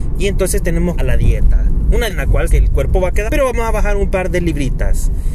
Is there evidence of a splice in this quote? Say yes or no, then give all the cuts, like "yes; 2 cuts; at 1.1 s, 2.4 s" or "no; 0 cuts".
yes; 4 cuts; at 1.0 s, 2.1 s, 2.5 s, 3.3 s